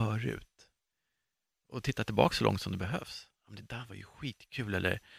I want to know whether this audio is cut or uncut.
uncut